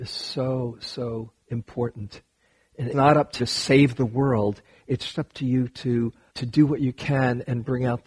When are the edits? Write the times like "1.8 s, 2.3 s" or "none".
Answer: 1.4 s, 2.9 s, 3.4 s, 5.1 s, 6.3 s